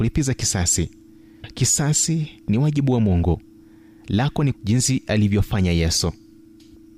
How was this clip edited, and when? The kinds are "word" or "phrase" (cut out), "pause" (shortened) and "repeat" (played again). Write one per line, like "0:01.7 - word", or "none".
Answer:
0:01.4 - phrase
0:04.5 - phrase